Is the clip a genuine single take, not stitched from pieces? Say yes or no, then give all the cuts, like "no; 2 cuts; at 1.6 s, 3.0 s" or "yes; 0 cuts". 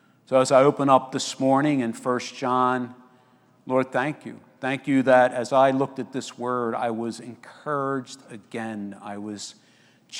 yes; 0 cuts